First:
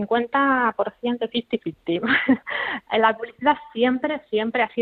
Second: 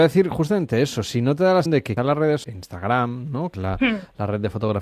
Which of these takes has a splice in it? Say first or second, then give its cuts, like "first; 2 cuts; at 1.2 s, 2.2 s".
second; 4 cuts; at 1.7 s, 2.0 s, 2.4 s, 3.5 s